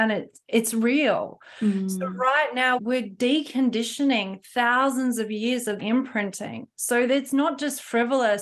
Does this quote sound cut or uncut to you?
cut